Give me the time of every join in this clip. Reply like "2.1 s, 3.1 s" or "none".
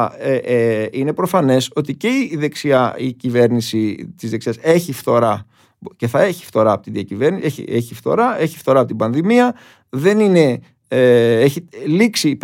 none